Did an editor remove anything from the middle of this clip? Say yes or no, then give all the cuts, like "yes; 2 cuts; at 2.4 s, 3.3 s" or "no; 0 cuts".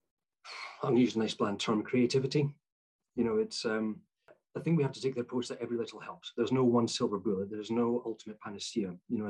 no; 0 cuts